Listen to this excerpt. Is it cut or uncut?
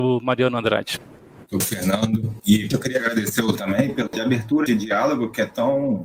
cut